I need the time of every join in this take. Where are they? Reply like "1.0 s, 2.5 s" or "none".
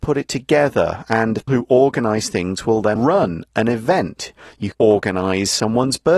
1.5 s, 3.0 s, 4.7 s